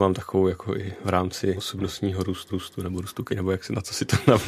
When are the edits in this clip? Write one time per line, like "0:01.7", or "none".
0:01.6
0:02.5
0:03.3